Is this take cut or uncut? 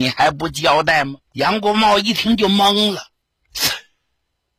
cut